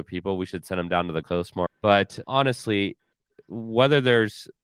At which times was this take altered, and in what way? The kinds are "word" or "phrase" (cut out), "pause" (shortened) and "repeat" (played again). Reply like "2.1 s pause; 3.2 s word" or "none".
1.2 s word; 1.7 s word; 2.2 s word